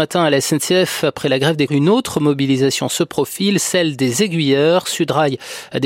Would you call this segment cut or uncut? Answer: cut